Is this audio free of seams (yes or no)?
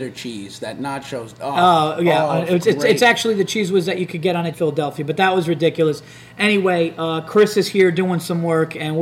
no